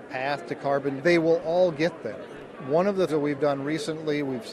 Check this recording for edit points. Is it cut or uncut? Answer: cut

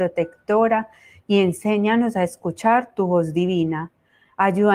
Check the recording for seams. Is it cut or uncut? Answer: uncut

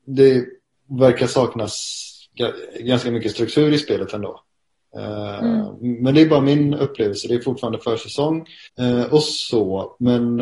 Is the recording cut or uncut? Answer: cut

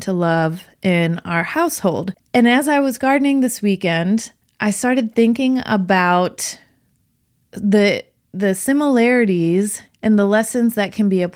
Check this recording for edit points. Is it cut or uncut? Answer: uncut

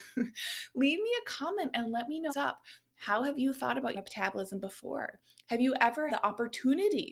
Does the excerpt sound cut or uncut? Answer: cut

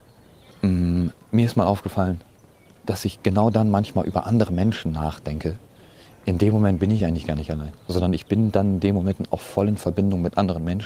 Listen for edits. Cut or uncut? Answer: uncut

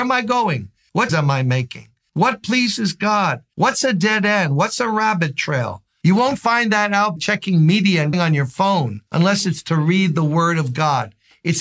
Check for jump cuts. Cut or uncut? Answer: cut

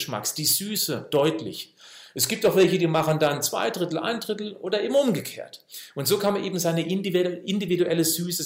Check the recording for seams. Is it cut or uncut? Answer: uncut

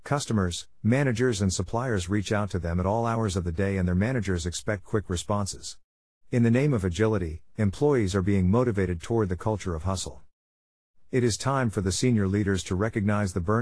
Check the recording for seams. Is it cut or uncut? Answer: uncut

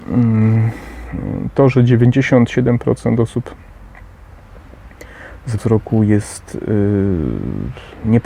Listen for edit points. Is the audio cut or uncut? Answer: cut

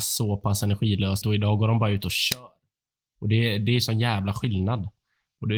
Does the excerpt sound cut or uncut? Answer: cut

